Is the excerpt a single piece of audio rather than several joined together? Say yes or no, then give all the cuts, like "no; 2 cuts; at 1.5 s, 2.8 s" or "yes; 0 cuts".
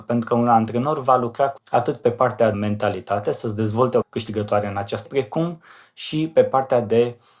no; 4 cuts; at 1.6 s, 2.5 s, 4.0 s, 5.1 s